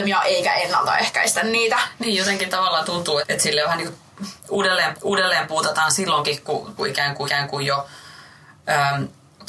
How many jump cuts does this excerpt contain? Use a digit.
4